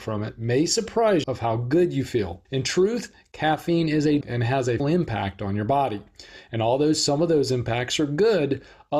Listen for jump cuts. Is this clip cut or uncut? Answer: cut